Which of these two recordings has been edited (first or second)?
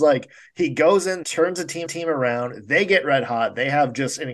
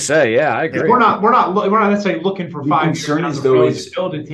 first